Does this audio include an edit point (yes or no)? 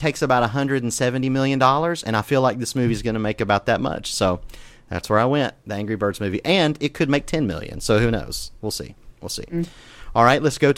no